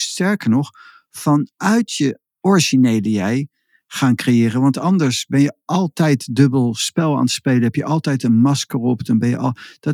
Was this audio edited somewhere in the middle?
no; 0 cuts

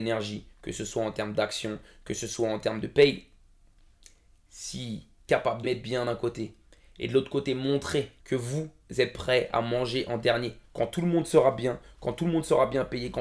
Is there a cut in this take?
yes; 4 cuts; at 5.3 s, 5.6 s, 8.2 s, 10.6 s

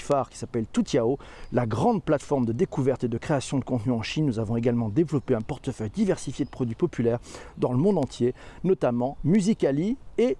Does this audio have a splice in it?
no; 0 cuts

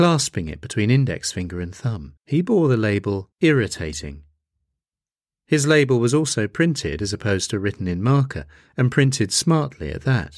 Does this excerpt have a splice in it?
yes; 2 cuts; at 2.2 s, 3.3 s

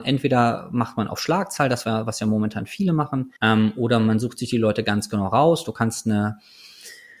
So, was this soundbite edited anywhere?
yes; 1 cut; at 3.4 s

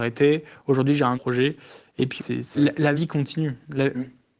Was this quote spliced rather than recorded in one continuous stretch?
yes; 4 cuts; at 1.1 s, 2.2 s, 2.5 s, 2.9 s

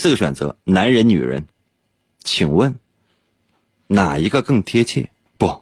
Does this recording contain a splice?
no; 0 cuts

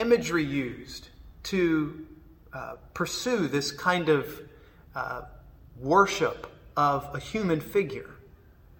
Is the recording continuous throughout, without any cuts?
yes; 0 cuts

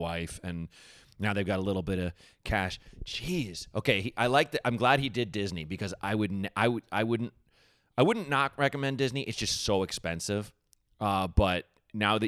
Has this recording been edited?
no; 0 cuts

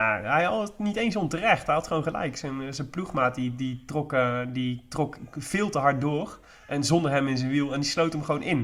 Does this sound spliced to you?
no; 0 cuts

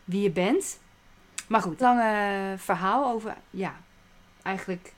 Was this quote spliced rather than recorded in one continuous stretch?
yes; 1 cut; at 1.8 s

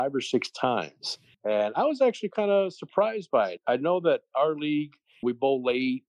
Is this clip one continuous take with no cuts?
yes; 0 cuts

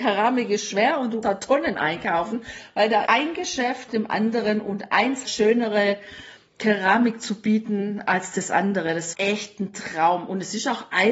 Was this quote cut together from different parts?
yes; 6 cuts; at 1.2 s, 1.7 s, 3.1 s, 3.9 s, 5.3 s, 9.1 s

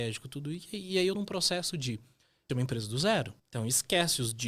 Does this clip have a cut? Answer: yes; 3 cuts; at 1.1 s, 2.5 s, 3.4 s

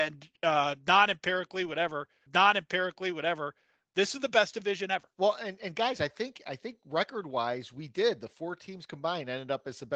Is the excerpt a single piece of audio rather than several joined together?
no; 2 cuts; at 2.3 s, 5.1 s

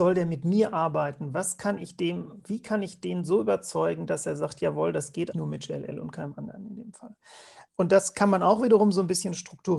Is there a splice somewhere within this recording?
yes; 2 cuts; at 5.3 s, 7.7 s

